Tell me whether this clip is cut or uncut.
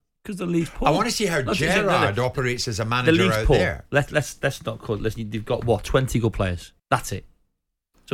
cut